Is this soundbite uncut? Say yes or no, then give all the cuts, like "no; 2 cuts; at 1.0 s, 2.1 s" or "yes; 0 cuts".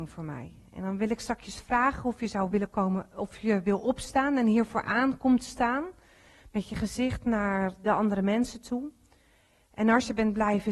yes; 0 cuts